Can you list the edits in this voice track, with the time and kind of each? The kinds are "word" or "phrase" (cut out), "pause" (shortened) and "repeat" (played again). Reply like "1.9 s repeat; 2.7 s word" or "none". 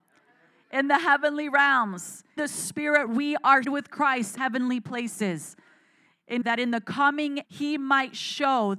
2.4 s word; 3.1 s word; 3.6 s word; 4.4 s word; 6.4 s word; 7.4 s word